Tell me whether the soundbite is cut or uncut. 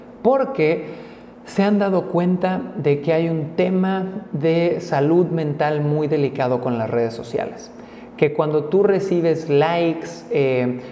uncut